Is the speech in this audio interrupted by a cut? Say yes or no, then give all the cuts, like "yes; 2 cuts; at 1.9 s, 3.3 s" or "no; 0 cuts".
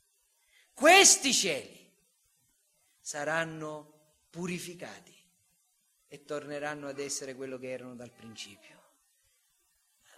no; 0 cuts